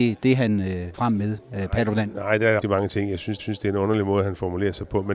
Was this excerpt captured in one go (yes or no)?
no